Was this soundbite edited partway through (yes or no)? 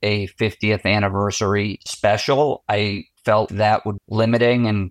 yes